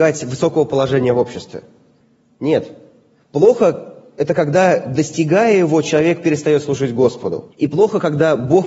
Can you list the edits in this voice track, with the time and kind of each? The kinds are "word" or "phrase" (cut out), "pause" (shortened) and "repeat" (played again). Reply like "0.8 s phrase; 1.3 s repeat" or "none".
7.5 s pause